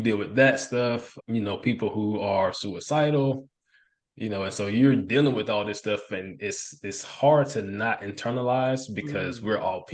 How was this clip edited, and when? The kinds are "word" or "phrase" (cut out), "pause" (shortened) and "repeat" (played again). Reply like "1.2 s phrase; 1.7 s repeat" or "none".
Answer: none

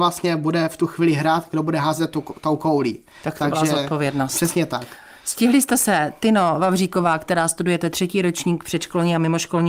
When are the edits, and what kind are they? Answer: none

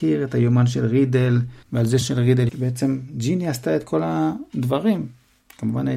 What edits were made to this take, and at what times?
1.6 s pause; 2.0 s word; 2.5 s phrase

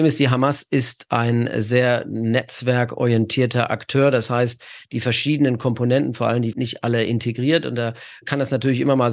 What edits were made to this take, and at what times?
6.5 s phrase

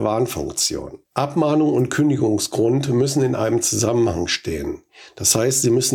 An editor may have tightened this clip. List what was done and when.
1.0 s pause

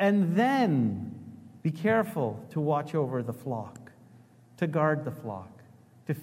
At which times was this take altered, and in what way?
1.6 s pause

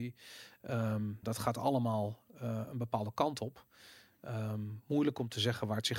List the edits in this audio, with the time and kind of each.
1.2 s word

